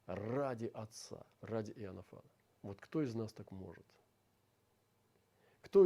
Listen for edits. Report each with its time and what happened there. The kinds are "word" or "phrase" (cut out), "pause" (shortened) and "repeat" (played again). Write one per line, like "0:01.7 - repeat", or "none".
0:01.3 - pause
0:02.5 - pause